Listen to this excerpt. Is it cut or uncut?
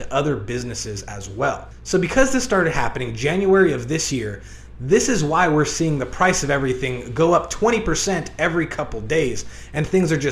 uncut